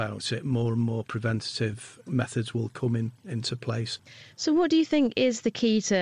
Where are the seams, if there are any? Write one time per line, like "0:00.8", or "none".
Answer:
none